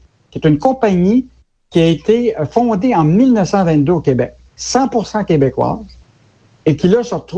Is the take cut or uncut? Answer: uncut